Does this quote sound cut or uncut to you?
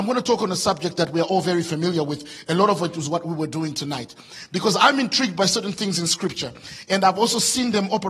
uncut